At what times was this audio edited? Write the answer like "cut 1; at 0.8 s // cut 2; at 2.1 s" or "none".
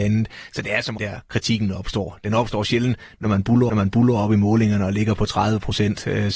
cut 1; at 1.0 s // cut 2; at 3.7 s // cut 3; at 5.2 s